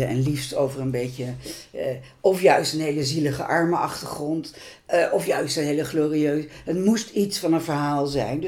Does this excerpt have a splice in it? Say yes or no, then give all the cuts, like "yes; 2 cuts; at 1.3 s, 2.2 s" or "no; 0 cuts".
no; 0 cuts